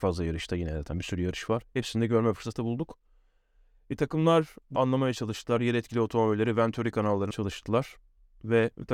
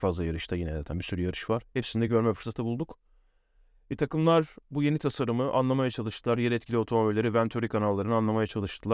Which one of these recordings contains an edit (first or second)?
first